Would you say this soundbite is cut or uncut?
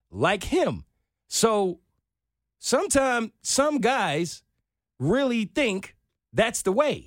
uncut